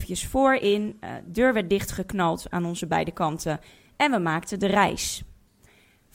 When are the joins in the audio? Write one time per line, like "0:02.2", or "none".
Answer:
none